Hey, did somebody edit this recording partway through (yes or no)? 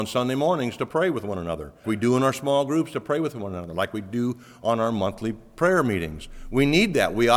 yes